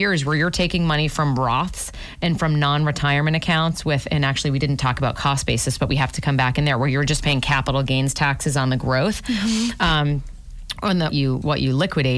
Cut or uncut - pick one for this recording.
cut